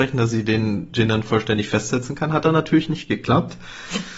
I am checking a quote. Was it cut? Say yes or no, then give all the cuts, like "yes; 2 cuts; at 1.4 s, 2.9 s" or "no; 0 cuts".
no; 0 cuts